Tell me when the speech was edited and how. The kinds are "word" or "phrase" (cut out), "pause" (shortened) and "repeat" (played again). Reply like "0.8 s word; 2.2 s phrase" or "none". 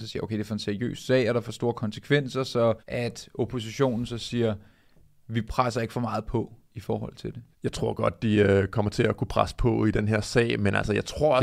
2.8 s pause; 7.5 s pause